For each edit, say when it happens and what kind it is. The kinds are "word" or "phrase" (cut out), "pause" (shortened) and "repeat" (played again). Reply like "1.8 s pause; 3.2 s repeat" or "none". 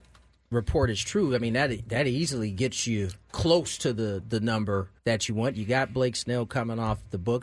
5.0 s pause

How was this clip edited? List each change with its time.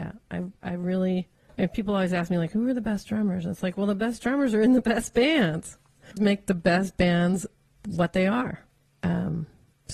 6.2 s phrase

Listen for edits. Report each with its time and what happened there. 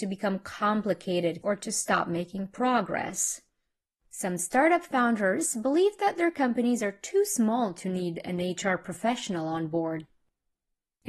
1.4 s word

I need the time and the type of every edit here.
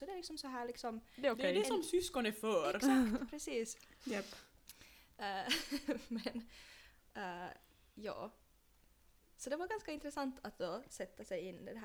none

